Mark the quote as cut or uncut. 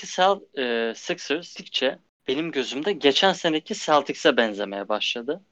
uncut